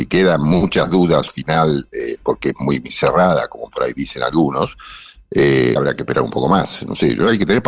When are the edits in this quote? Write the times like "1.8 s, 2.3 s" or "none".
1.3 s, 2.9 s, 5.8 s